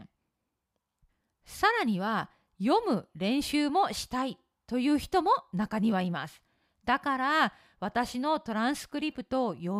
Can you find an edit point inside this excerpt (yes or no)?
no